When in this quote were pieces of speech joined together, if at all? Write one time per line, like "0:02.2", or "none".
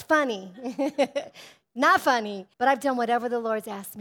0:02.5